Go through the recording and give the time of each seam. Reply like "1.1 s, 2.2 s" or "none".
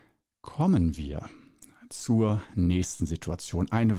none